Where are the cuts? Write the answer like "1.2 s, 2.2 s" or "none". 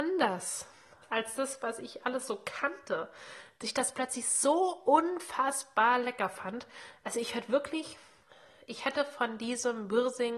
none